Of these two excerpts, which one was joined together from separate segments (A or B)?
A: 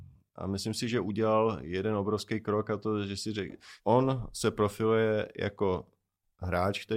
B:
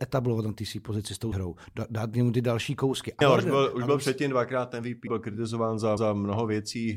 B